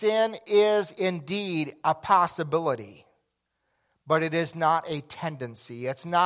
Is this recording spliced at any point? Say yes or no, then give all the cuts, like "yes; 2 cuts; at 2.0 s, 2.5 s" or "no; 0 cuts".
no; 0 cuts